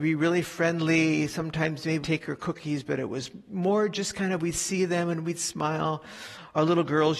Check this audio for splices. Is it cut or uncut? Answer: cut